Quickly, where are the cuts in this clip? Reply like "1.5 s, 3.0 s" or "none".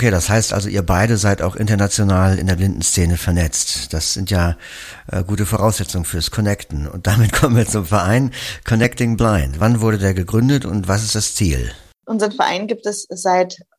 none